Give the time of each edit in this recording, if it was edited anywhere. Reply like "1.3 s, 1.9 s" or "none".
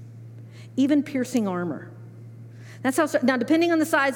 none